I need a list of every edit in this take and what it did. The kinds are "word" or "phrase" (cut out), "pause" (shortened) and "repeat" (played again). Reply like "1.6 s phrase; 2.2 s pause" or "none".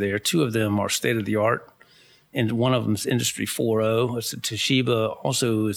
none

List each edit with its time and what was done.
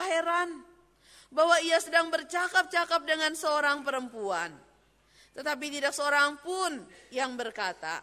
none

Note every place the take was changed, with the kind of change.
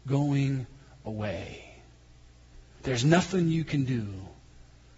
none

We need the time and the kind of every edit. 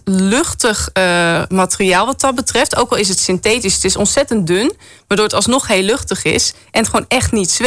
none

